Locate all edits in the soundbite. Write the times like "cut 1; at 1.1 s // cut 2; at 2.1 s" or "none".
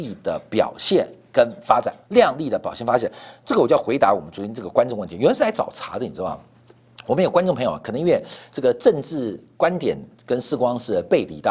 cut 1; at 2.0 s